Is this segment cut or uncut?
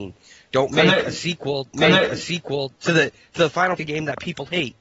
cut